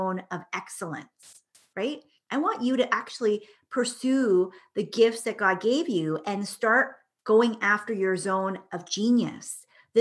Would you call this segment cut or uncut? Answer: uncut